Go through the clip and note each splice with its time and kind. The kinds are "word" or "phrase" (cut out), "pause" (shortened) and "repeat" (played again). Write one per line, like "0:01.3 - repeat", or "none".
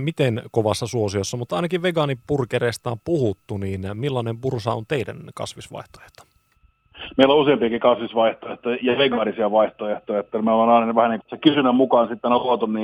0:11.2 - word